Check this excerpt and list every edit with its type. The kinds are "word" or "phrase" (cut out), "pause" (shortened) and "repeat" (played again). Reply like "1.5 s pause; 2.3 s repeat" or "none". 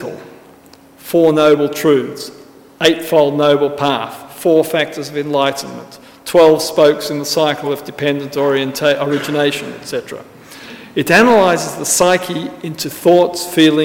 none